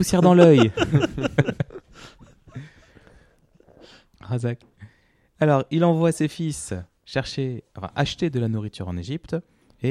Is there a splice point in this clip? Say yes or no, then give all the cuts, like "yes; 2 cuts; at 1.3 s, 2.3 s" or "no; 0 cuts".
no; 0 cuts